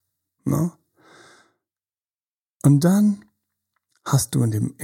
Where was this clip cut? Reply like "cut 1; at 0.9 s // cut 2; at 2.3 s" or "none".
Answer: none